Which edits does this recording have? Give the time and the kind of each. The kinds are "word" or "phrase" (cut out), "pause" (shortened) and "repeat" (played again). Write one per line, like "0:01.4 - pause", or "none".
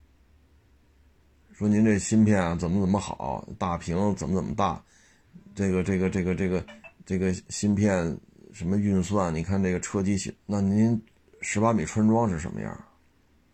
0:10.4 - pause